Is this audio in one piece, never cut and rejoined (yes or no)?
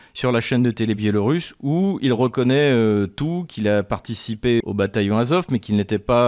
yes